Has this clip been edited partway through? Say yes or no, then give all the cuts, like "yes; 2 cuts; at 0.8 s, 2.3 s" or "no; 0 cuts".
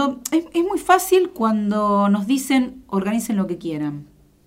no; 0 cuts